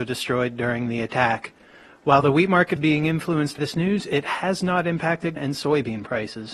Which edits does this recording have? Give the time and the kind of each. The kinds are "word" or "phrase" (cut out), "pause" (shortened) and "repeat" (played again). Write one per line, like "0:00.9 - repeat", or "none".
0:02.8 - word
0:03.6 - word
0:05.4 - word